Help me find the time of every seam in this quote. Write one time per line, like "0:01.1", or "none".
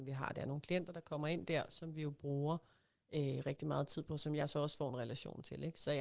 none